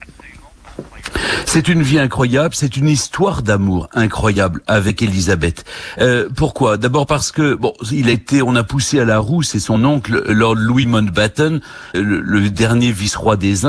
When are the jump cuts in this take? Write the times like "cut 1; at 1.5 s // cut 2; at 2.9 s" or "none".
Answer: cut 1; at 11.9 s